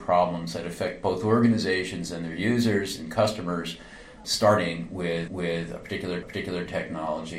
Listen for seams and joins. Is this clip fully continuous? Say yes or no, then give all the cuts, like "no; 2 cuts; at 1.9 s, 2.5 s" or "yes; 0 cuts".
no; 3 cuts; at 4.2 s, 5.3 s, 6.2 s